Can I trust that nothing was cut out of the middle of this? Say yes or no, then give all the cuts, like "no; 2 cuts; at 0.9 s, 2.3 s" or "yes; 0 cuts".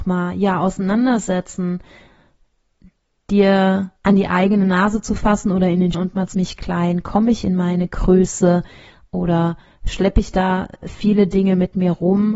no; 3 cuts; at 4.0 s, 5.9 s, 6.3 s